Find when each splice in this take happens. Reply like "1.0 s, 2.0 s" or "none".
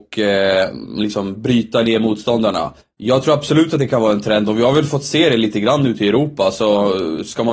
2.8 s